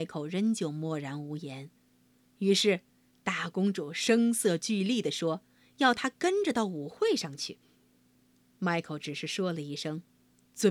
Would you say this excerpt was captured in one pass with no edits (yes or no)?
yes